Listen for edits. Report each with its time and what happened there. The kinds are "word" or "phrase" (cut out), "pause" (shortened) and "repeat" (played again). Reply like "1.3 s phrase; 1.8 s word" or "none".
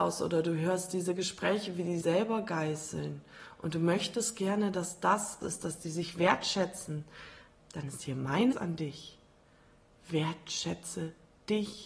2.0 s word; 5.4 s word; 7.6 s word; 8.5 s word